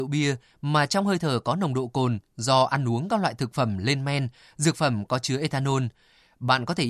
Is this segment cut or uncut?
uncut